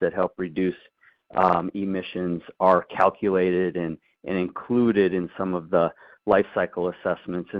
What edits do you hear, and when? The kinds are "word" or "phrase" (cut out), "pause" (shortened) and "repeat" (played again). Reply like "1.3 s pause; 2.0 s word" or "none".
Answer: none